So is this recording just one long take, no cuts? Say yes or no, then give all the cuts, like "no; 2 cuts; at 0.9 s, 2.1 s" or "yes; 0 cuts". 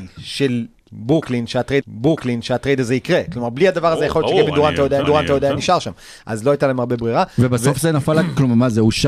no; 2 cuts; at 1.8 s, 5.0 s